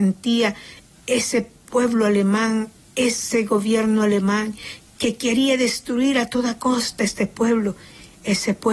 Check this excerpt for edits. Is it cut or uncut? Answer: uncut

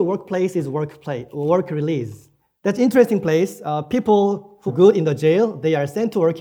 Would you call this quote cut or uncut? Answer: cut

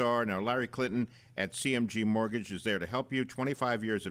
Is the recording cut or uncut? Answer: uncut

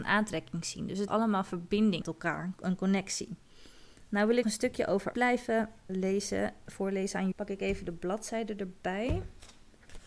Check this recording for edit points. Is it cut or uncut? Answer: cut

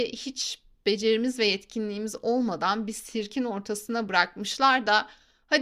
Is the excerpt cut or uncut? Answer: uncut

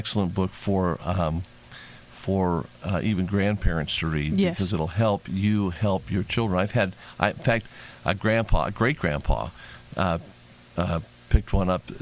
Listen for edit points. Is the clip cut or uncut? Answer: uncut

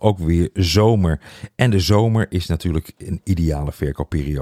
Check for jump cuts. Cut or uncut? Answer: uncut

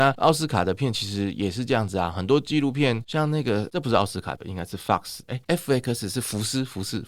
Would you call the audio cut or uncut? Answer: cut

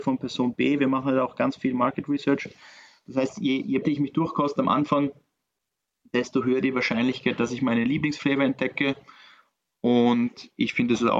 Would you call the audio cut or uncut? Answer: cut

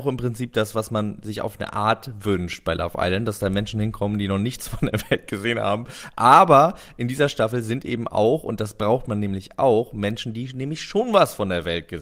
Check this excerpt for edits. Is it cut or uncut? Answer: uncut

